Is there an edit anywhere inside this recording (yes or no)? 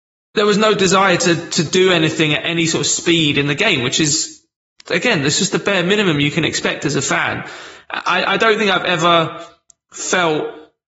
no